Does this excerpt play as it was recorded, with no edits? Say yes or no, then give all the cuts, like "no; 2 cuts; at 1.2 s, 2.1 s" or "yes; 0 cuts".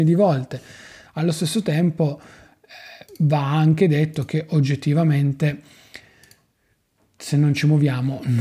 yes; 0 cuts